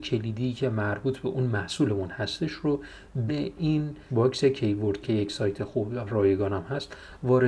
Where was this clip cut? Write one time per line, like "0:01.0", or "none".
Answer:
0:03.3
0:04.1
0:05.0
0:06.1